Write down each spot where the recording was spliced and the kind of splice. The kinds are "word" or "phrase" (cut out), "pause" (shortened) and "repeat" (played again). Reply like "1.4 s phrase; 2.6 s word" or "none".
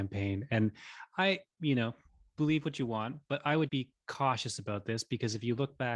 1.5 s word; 3.7 s word